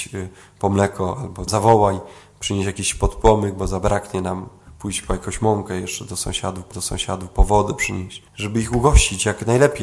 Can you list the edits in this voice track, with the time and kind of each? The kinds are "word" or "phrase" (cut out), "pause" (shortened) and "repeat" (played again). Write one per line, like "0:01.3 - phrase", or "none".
0:01.5 - phrase
0:06.7 - repeat
0:08.3 - pause